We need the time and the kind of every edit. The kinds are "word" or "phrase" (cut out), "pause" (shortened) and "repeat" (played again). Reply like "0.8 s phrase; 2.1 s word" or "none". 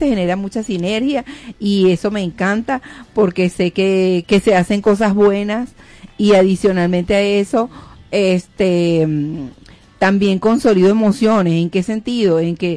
4.2 s word